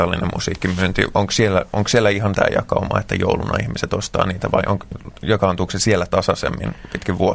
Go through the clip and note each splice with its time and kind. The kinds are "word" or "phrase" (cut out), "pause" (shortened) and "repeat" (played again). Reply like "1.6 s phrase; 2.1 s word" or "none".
2.3 s word